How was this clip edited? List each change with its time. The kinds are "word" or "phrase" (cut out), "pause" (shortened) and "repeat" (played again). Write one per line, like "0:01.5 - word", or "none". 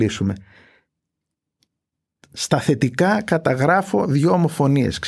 none